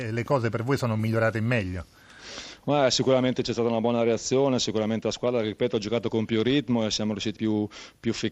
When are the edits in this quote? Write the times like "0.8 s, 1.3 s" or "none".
7.4 s